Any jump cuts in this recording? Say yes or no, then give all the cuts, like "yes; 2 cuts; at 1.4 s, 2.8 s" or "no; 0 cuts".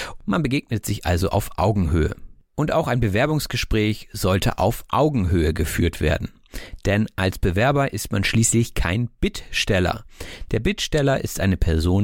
no; 0 cuts